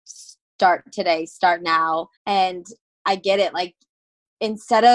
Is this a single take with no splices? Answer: no; 1 cut; at 2.2 s

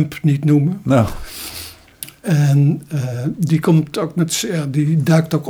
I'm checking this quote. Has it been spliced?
no; 0 cuts

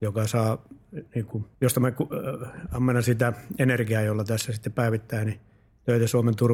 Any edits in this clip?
yes; 2 cuts; at 1.1 s, 1.5 s

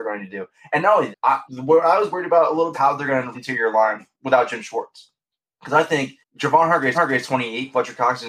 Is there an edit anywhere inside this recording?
yes; 8 cuts; at 1.1 s, 1.5 s, 2.7 s, 3.3 s, 4.1 s, 5.2 s, 6.2 s, 6.9 s

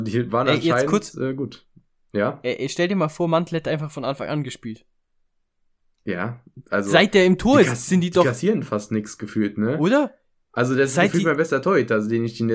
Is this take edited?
no; 0 cuts

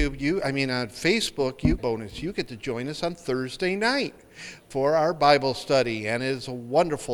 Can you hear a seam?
yes; 1 cut; at 1.8 s

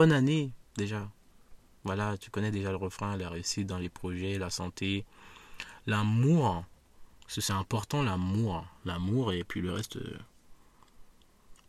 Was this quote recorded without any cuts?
yes; 0 cuts

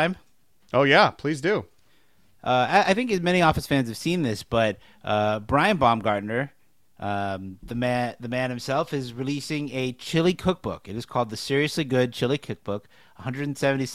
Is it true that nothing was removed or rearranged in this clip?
yes; 0 cuts

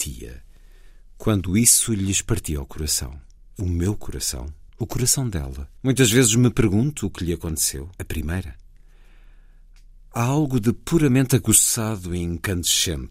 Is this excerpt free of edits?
no; 4 cuts; at 3.4 s, 4.7 s, 5.8 s, 8.0 s

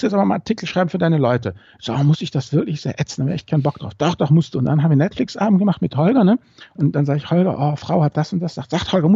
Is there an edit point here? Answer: no; 0 cuts

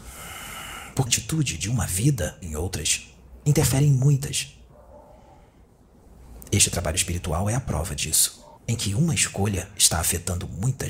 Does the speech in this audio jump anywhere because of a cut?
yes; 3 cuts; at 1.1 s, 2.4 s, 8.6 s

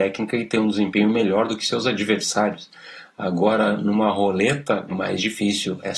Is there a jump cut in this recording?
yes; 1 cut; at 4.9 s

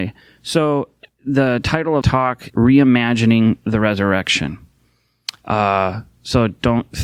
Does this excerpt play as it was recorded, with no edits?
no; 3 cuts; at 1.1 s, 2.0 s, 2.5 s

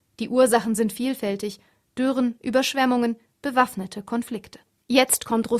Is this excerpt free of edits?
yes; 0 cuts

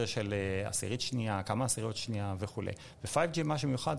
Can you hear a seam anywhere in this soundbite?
no; 0 cuts

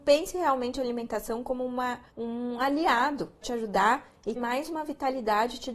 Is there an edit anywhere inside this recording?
yes; 3 cuts; at 2.1 s, 3.4 s, 4.4 s

